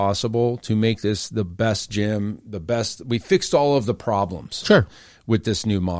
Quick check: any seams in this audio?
no; 0 cuts

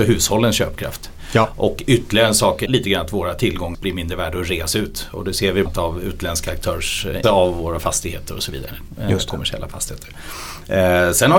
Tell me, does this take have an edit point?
yes; 4 cuts; at 2.7 s, 3.7 s, 5.7 s, 7.2 s

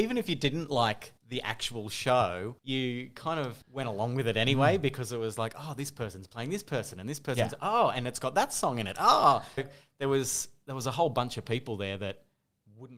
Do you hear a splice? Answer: yes; 4 cuts; at 1.2 s, 2.6 s, 3.6 s, 9.6 s

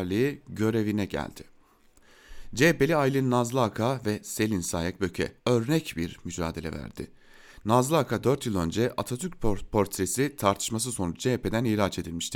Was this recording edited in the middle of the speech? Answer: yes; 1 cut; at 5.4 s

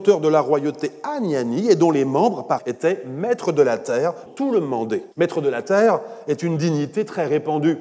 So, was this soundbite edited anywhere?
yes; 3 cuts; at 2.6 s, 4.3 s, 5.1 s

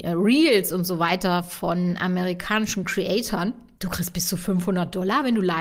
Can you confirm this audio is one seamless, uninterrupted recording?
yes; 0 cuts

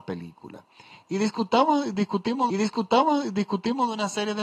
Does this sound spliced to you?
yes; 1 cut; at 2.5 s

